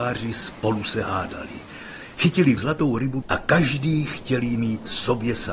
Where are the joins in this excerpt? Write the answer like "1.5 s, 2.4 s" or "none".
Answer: 2.6 s, 3.2 s